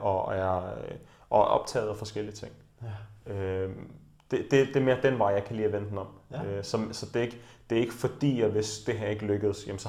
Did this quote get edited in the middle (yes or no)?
no